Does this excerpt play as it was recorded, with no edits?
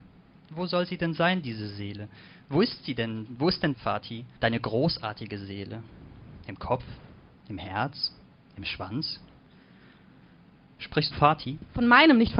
no; 3 cuts; at 3.7 s, 4.4 s, 11.1 s

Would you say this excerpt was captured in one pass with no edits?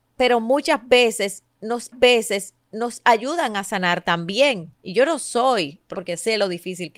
no; 3 cuts; at 1.9 s, 4.7 s, 5.9 s

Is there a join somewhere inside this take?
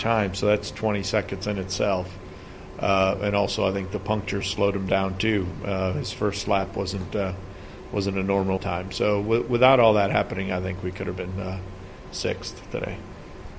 yes; 1 cut; at 8.6 s

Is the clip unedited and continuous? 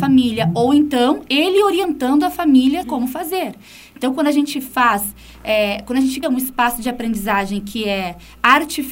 no; 2 cuts; at 2.8 s, 6.2 s

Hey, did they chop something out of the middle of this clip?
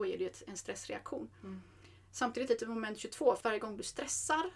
yes; 2 cuts; at 2.5 s, 3.4 s

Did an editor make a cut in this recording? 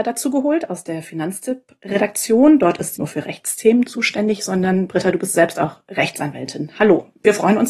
yes; 1 cut; at 3.0 s

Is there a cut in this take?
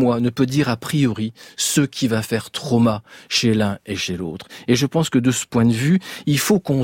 no; 0 cuts

